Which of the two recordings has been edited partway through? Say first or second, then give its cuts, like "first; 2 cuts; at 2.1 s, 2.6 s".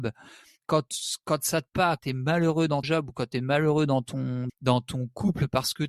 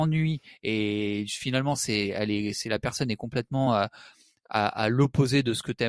first; 4 cuts; at 1.7 s, 2.0 s, 2.8 s, 4.5 s